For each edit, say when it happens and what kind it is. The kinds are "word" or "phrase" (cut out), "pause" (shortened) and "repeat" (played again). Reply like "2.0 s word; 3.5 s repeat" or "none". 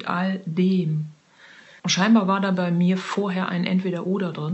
1.8 s pause